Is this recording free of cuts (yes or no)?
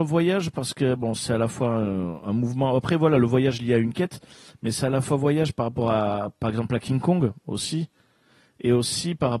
yes